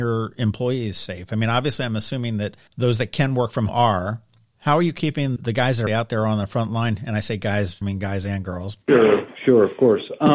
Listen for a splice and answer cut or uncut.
cut